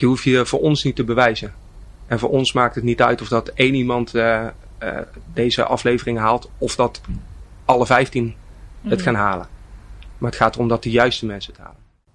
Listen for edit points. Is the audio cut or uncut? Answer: uncut